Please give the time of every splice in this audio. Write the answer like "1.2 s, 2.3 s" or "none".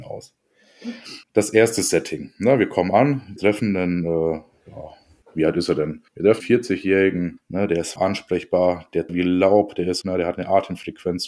1.2 s, 3.4 s, 5.2 s, 6.1 s, 6.4 s, 7.4 s, 8.0 s, 9.1 s, 10.0 s